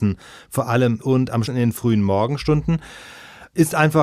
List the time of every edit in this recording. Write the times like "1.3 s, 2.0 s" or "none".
1.0 s, 1.5 s